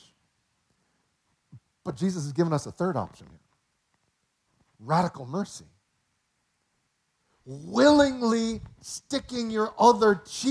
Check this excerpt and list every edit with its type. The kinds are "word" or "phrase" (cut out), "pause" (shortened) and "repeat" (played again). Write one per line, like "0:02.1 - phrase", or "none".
none